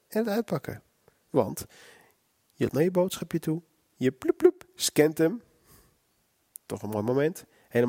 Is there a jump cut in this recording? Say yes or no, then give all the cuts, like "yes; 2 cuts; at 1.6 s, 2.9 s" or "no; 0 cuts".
yes; 1 cut; at 2.7 s